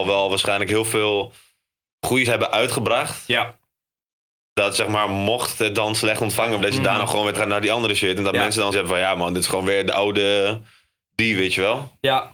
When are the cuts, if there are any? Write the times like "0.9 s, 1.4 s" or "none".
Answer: 2.2 s, 6.6 s, 7.3 s, 8.7 s